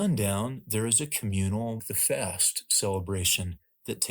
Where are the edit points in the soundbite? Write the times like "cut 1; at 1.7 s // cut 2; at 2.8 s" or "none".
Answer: cut 1; at 1.8 s